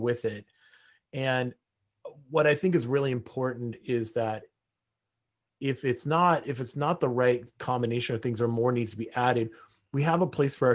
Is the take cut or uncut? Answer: uncut